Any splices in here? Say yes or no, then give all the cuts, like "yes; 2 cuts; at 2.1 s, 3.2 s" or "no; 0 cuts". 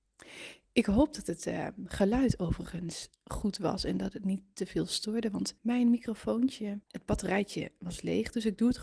yes; 2 cuts; at 5.6 s, 6.8 s